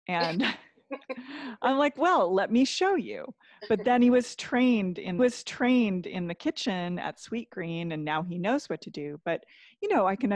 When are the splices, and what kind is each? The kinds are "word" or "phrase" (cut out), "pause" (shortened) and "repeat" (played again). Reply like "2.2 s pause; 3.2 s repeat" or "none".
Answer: 5.2 s repeat